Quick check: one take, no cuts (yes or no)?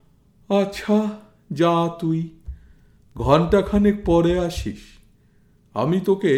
yes